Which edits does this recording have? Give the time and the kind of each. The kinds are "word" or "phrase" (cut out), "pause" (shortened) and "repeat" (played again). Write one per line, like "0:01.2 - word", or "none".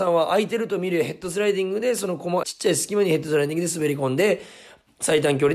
0:02.4 - phrase